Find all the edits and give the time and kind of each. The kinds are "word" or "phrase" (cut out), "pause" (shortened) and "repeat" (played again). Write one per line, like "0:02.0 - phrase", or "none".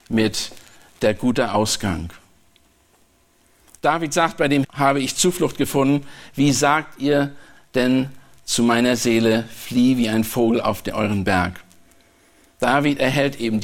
0:04.6 - word

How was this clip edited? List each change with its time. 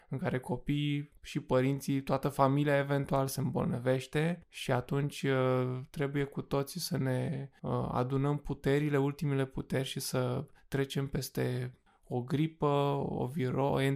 none

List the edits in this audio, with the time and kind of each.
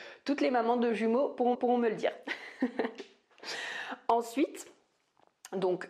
0:01.5 - repeat

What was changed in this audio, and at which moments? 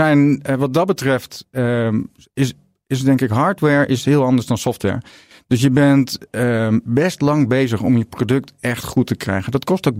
none

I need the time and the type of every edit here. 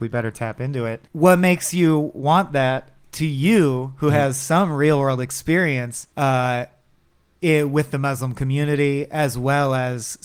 0:01.1 - pause
0:06.1 - pause

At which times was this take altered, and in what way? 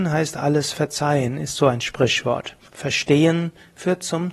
0:02.6 - pause

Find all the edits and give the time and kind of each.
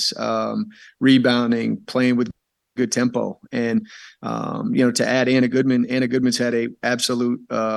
none

